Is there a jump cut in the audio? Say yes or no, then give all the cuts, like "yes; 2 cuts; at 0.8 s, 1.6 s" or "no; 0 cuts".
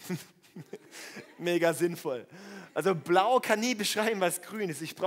no; 0 cuts